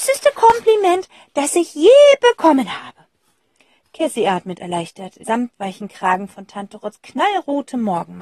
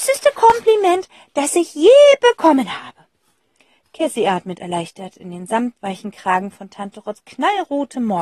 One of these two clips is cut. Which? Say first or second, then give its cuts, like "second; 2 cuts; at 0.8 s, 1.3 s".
first; 1 cut; at 5.2 s